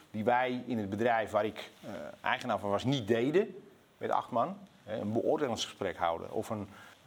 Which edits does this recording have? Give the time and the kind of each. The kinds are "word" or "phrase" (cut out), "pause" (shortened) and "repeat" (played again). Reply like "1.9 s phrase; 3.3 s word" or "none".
none